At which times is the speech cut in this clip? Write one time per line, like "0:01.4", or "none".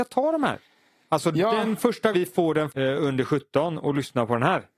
0:02.1
0:02.7